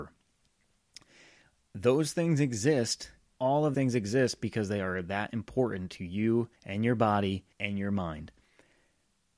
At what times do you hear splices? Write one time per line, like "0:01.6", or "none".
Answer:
0:03.3
0:03.7
0:06.6
0:07.5